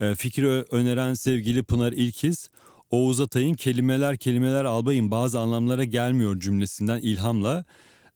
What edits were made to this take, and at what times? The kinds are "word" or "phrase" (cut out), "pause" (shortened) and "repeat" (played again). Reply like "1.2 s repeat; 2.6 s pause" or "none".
none